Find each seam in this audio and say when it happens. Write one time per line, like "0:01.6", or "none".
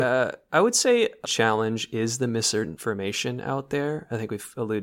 0:01.2